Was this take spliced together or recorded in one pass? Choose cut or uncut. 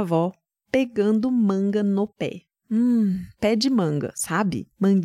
cut